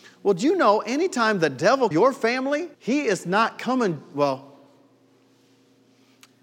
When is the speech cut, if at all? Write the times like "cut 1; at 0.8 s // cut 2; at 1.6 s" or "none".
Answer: cut 1; at 1.9 s // cut 2; at 2.7 s